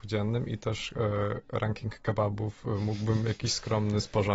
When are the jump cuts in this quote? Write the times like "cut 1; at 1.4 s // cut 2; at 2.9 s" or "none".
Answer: none